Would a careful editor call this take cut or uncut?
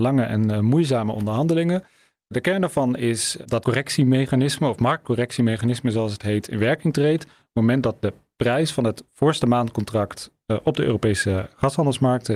cut